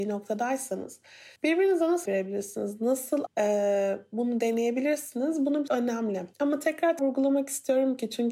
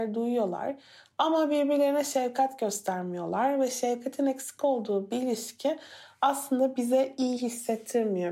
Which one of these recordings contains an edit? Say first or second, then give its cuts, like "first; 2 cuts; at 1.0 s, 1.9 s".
first; 6 cuts; at 1.4 s, 2.1 s, 3.3 s, 5.7 s, 6.3 s, 7.0 s